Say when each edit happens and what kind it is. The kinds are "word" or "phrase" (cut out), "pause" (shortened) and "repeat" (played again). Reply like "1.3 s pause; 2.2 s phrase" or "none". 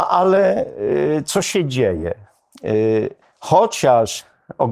3.2 s pause